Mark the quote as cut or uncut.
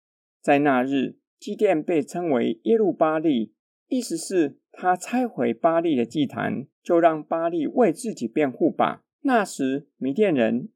cut